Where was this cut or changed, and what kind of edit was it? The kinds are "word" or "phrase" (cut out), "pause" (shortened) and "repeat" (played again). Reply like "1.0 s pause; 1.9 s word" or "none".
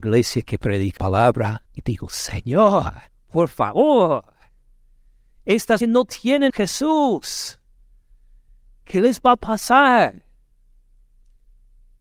1.0 s word; 1.7 s pause; 3.1 s pause; 5.8 s phrase; 6.5 s phrase